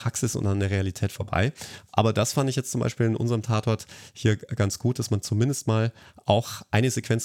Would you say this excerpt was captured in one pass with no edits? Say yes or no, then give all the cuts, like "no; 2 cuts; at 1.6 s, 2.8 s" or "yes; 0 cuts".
yes; 0 cuts